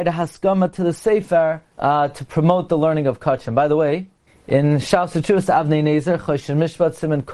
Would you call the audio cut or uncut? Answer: cut